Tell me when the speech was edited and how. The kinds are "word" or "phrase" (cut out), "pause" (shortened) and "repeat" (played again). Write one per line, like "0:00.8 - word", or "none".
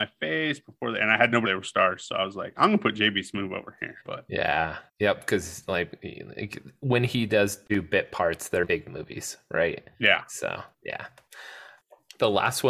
0:01.4 - phrase
0:04.0 - pause
0:04.9 - pause
0:09.9 - pause
0:10.7 - pause